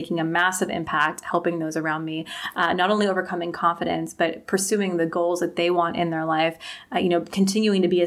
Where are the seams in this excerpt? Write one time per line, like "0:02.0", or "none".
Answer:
none